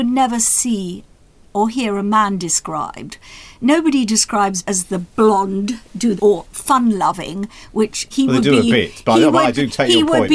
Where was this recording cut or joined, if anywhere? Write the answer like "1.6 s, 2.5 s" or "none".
4.6 s, 6.2 s, 8.1 s